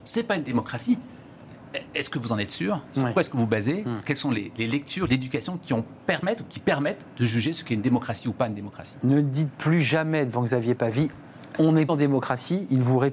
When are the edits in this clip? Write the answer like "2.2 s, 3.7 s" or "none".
11.9 s